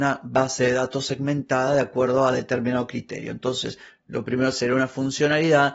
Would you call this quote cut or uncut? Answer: uncut